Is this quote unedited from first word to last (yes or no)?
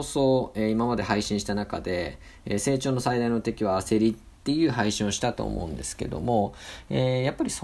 no